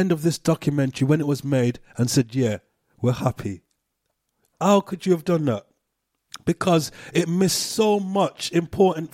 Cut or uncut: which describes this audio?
uncut